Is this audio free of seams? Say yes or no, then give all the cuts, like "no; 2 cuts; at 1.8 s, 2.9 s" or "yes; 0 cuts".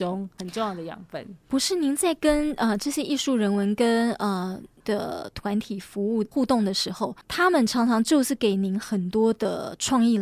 no; 1 cut; at 4.8 s